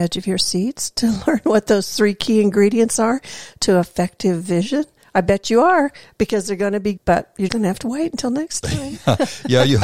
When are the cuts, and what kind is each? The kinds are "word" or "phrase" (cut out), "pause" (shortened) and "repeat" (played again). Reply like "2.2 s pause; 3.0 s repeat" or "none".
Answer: 7.0 s word; 7.5 s word